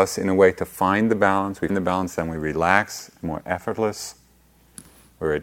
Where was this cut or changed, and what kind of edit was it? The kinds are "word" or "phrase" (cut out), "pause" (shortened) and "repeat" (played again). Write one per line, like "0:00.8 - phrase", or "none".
0:01.7 - word
0:03.2 - word